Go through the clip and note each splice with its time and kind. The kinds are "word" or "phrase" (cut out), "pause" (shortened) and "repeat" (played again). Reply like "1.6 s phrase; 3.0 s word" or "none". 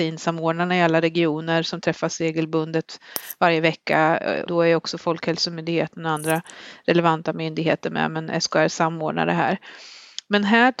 4.5 s word